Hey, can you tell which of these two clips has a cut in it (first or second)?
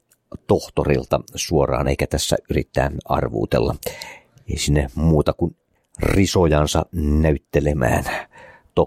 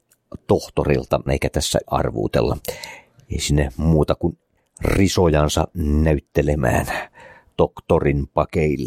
second